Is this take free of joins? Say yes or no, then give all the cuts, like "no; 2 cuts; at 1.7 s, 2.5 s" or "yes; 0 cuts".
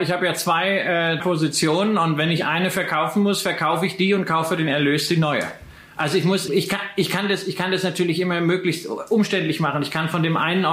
no; 2 cuts; at 1.2 s, 6.5 s